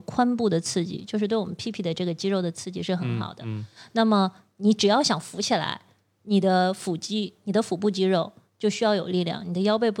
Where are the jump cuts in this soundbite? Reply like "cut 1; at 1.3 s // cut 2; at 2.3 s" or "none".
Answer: none